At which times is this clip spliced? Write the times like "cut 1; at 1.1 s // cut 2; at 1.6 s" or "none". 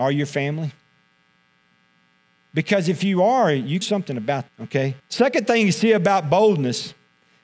cut 1; at 3.8 s // cut 2; at 4.5 s // cut 3; at 5.0 s